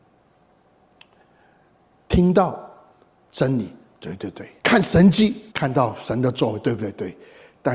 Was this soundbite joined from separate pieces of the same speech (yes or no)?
yes